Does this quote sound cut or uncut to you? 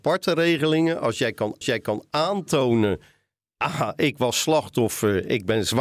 cut